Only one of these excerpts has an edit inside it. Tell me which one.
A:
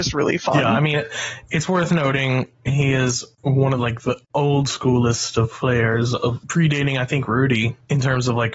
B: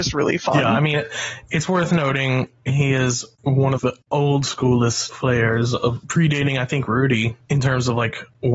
B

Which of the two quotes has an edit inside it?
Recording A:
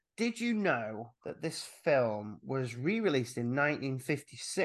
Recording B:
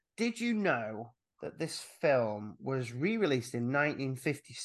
A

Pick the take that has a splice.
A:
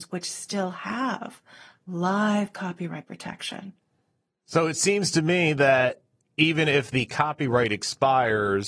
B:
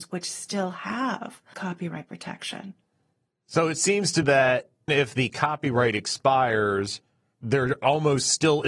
B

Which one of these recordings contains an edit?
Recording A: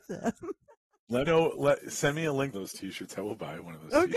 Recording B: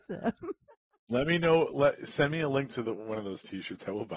A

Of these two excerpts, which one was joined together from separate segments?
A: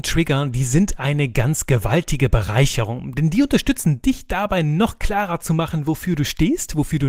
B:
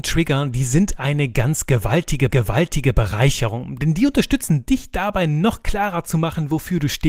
B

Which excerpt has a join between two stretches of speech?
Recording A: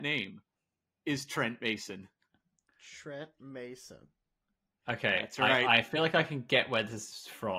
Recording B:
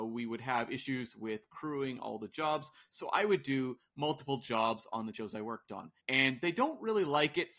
B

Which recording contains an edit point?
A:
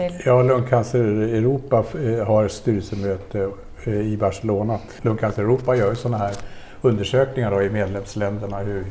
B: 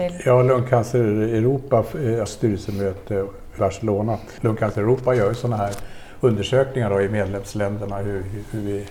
B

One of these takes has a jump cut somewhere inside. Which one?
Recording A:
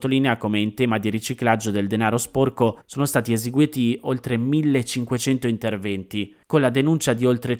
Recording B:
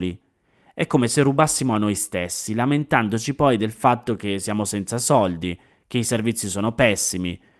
A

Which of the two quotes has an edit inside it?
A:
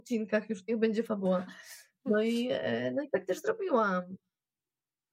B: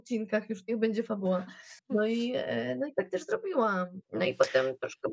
B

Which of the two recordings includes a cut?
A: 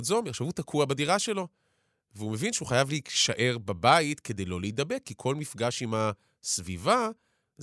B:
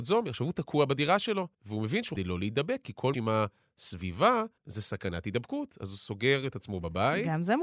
B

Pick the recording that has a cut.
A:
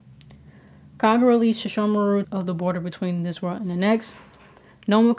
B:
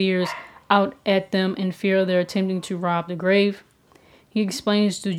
A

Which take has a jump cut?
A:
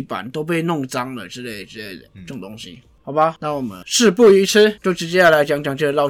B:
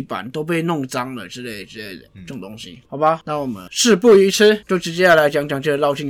B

